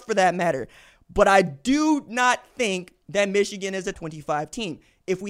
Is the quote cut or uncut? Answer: cut